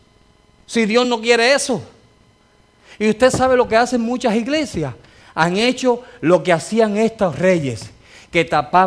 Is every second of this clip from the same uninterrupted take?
yes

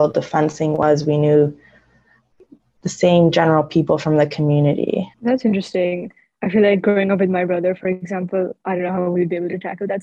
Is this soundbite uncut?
no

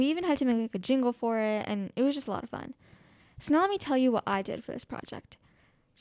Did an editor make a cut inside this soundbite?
no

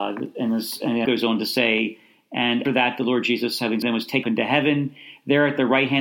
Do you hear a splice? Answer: yes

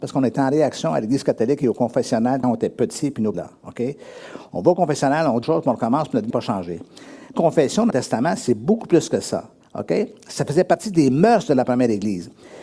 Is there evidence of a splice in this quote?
yes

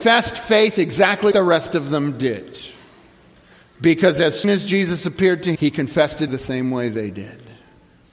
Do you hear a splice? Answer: yes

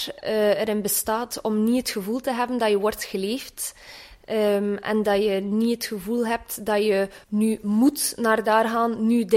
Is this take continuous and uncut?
no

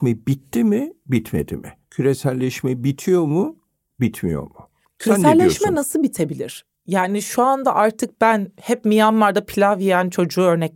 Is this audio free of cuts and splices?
yes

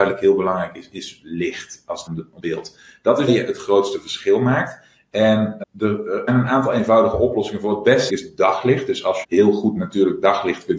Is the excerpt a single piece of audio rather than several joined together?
no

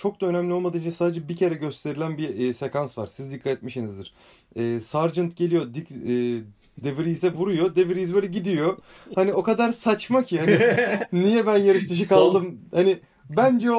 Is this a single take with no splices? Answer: yes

